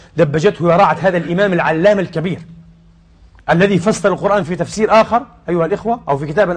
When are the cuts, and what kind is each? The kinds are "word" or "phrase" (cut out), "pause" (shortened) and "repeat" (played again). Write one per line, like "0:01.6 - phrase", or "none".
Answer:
none